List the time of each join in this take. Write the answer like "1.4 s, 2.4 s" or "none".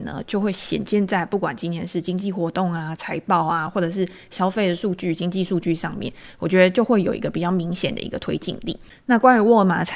none